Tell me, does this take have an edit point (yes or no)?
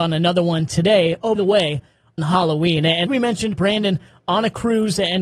yes